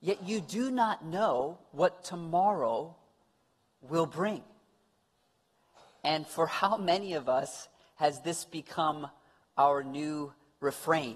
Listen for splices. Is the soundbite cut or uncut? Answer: uncut